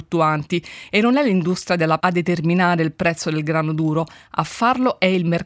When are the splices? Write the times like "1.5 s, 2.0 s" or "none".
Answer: 2.0 s